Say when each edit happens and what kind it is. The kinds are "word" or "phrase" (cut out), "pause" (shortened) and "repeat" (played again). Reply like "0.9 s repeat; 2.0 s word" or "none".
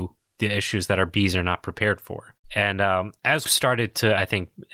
2.4 s pause; 3.5 s word